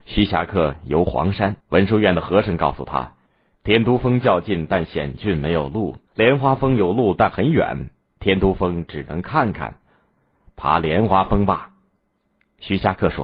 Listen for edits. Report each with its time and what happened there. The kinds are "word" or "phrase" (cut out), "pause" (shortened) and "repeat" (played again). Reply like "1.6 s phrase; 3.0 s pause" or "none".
1.6 s pause; 6.1 s pause

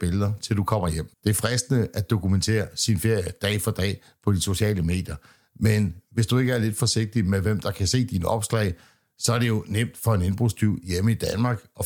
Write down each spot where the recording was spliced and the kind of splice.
1.1 s pause

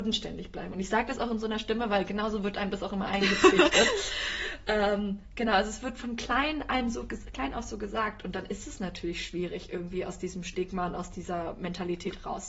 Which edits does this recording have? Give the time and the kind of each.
none

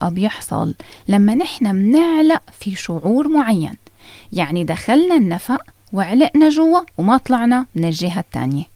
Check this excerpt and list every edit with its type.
6.9 s pause

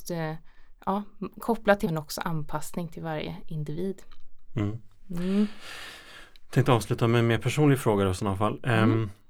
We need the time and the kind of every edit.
1.8 s word

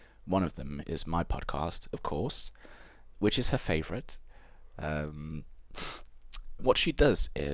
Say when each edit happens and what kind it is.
3.1 s word; 6.6 s word

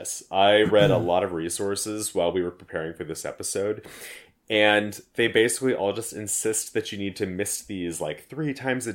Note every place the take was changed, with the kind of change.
none

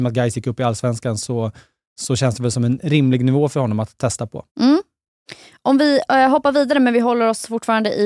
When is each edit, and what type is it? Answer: 4.5 s pause

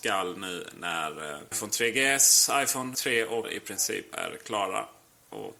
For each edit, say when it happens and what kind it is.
1.5 s word; 2.9 s word; 3.4 s word

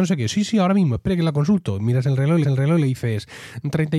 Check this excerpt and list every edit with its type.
2.4 s repeat

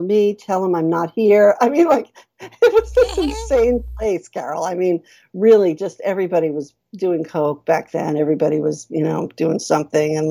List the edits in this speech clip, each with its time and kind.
none

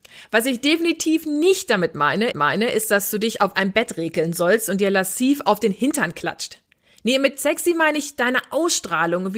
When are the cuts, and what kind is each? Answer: 2.3 s repeat

